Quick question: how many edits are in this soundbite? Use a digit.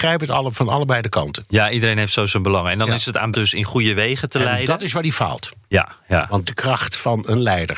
3